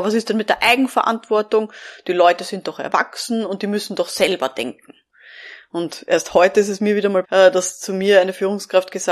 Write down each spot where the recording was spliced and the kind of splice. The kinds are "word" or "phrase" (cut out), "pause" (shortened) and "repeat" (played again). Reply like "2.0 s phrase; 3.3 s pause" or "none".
7.2 s word